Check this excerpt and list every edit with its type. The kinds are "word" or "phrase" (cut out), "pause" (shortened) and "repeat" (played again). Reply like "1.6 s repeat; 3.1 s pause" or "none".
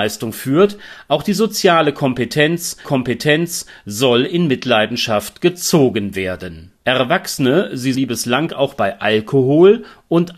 2.8 s repeat; 7.9 s word